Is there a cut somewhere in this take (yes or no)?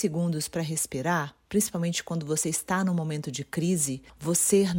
no